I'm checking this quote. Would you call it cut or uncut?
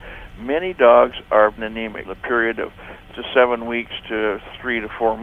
cut